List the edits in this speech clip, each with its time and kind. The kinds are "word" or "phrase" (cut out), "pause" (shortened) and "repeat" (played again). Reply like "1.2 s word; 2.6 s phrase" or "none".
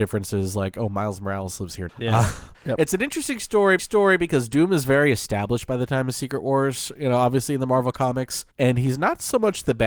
1.9 s word; 2.5 s pause; 3.8 s repeat; 8.5 s pause

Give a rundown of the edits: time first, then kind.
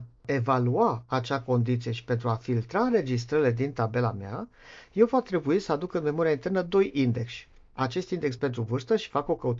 none

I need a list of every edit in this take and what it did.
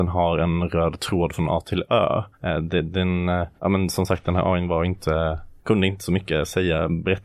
2.3 s pause; 3.6 s pause; 5.6 s pause

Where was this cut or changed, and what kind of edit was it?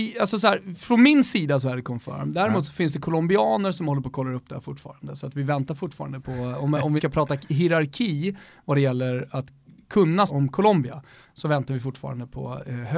6.2 s phrase; 7.0 s word; 10.3 s word

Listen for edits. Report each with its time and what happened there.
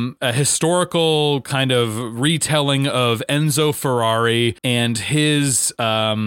4.6 s pause

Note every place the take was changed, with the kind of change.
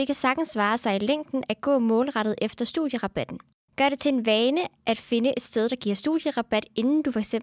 3.6 s pause

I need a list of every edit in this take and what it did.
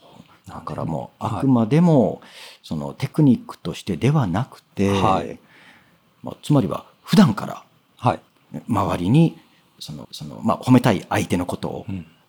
10.0 s repeat

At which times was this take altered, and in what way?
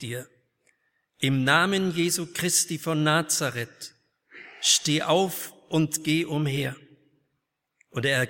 none

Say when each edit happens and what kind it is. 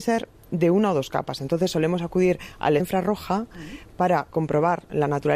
2.8 s word

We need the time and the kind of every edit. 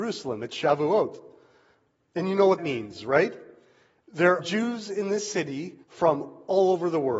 2.6 s word; 4.4 s word; 5.8 s pause

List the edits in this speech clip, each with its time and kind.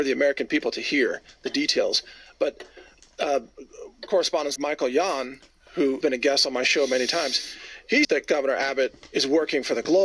4.1 s word; 4.6 s word; 6.0 s word; 8.0 s word

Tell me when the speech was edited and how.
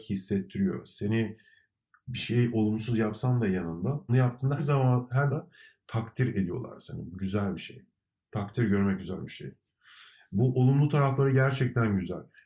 4.1 s word; 4.6 s word; 5.3 s word

